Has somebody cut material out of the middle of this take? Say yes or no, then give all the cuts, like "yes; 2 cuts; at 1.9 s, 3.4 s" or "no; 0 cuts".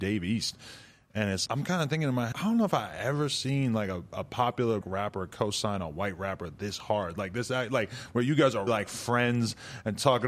yes; 4 cuts; at 1.5 s, 2.3 s, 4.8 s, 8.7 s